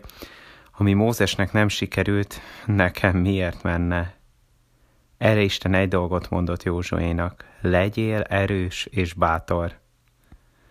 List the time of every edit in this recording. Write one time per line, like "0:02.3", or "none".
none